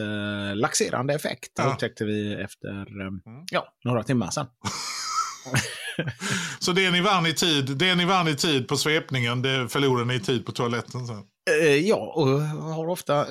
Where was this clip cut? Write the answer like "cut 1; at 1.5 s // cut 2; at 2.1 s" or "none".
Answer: cut 1; at 1.6 s